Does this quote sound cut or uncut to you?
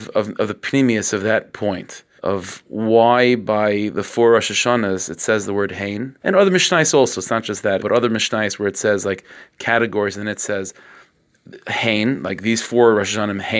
cut